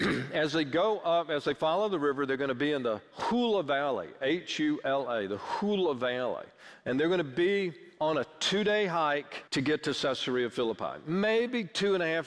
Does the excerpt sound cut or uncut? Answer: cut